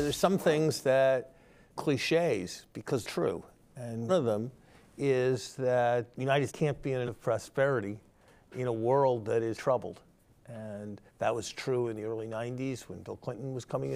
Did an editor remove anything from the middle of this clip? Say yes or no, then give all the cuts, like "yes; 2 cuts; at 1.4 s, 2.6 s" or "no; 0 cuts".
yes; 8 cuts; at 1.8 s, 3.0 s, 4.1 s, 6.1 s, 6.5 s, 7.1 s, 9.5 s, 11.1 s